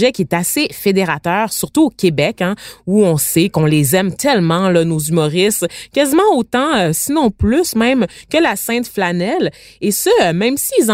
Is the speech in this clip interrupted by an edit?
no; 0 cuts

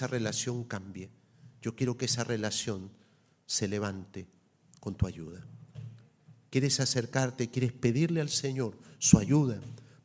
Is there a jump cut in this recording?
no; 0 cuts

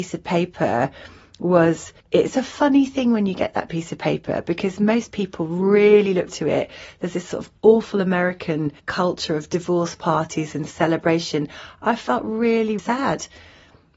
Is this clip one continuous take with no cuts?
no; 4 cuts; at 2.0 s, 6.3 s, 8.8 s, 12.8 s

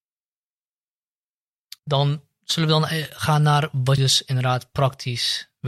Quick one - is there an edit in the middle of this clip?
yes; 2 cuts; at 1.8 s, 4.0 s

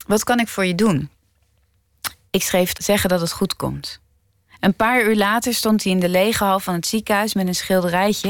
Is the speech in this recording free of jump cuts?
no; 1 cut; at 2.7 s

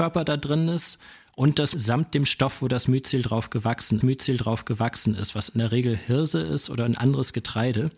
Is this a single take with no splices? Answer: no; 2 cuts; at 1.7 s, 4.0 s

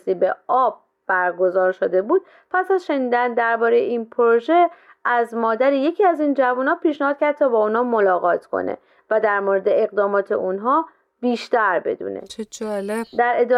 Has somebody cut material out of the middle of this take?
no; 0 cuts

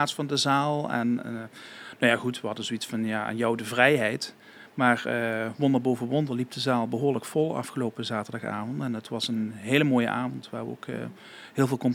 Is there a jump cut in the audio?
no; 0 cuts

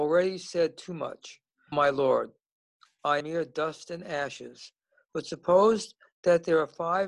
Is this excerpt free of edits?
no; 2 cuts; at 1.7 s, 3.2 s

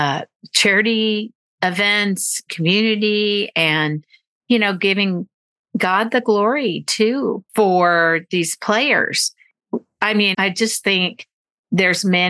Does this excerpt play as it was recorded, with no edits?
no; 3 cuts; at 2.5 s, 7.5 s, 10.3 s

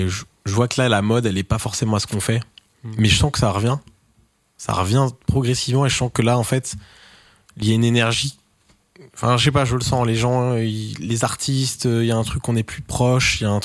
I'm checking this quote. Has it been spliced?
no; 0 cuts

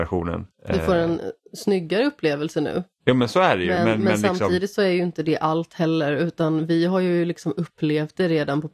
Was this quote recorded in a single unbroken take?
yes; 0 cuts

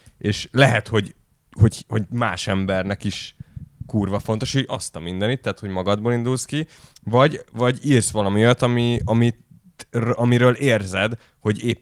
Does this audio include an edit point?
no; 0 cuts

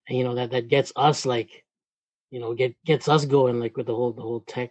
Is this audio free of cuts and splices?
yes; 0 cuts

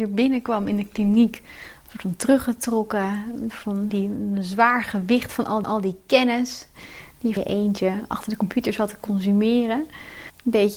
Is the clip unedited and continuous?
no; 3 cuts; at 3.9 s, 5.6 s, 7.4 s

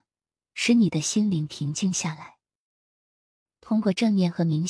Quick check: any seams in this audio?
no; 0 cuts

